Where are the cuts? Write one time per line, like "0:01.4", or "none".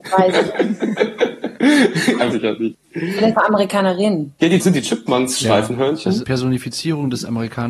0:02.3
0:03.4
0:04.6
0:06.2